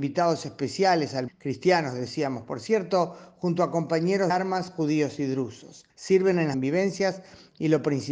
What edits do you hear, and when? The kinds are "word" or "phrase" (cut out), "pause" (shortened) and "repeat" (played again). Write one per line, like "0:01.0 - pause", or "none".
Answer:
0:01.3 - word
0:04.3 - word
0:05.9 - pause
0:06.5 - phrase

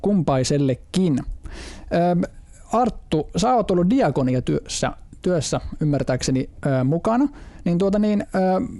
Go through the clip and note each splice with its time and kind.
none

